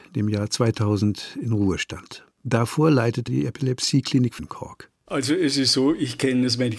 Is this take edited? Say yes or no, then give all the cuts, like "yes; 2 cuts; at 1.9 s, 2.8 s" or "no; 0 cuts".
yes; 3 cuts; at 2.3 s, 3.3 s, 4.4 s